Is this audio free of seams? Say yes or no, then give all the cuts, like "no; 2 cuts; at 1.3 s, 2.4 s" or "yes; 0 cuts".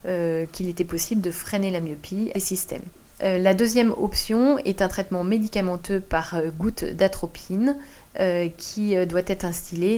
no; 2 cuts; at 2.3 s, 3.1 s